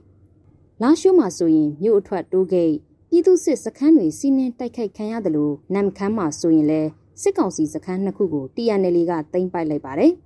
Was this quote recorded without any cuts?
no; 1 cut; at 5.6 s

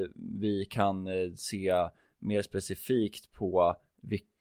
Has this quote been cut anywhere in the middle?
no; 0 cuts

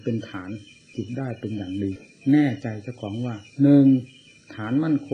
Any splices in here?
no; 0 cuts

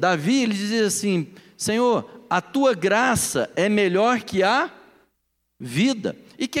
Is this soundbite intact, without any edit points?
yes; 0 cuts

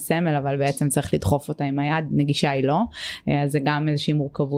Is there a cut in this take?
no; 0 cuts

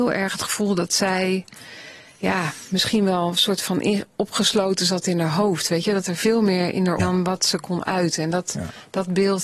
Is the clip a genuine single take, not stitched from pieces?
no; 1 cut; at 7.0 s

